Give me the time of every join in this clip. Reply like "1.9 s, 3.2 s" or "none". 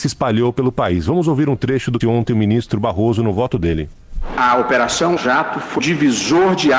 2.0 s, 5.2 s, 5.8 s